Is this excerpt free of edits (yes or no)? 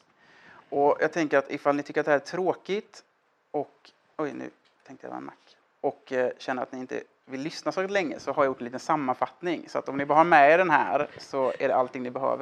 yes